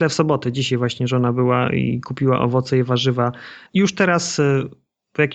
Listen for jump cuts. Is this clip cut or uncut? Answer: cut